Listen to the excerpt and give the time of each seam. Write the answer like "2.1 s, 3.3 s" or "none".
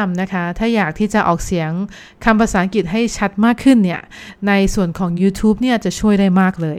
none